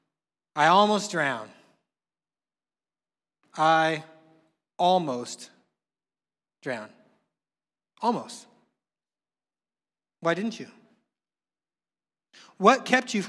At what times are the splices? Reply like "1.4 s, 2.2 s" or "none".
none